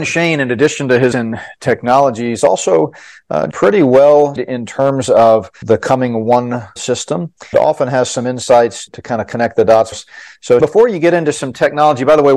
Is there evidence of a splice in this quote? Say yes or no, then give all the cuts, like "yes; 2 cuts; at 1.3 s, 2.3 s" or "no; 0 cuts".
yes; 9 cuts; at 1.1 s, 3.5 s, 4.4 s, 5.6 s, 6.8 s, 7.5 s, 8.9 s, 9.9 s, 10.6 s